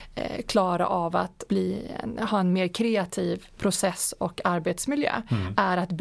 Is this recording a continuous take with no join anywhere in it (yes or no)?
no